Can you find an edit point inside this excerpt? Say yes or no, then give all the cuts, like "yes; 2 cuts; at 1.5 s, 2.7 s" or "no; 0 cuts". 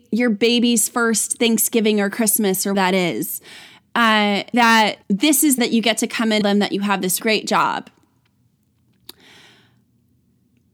yes; 6 cuts; at 2.7 s, 4.5 s, 5.0 s, 5.6 s, 6.4 s, 7.2 s